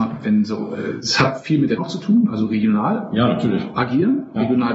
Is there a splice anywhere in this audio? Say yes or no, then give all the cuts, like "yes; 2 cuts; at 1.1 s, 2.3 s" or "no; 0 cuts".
yes; 1 cut; at 1.8 s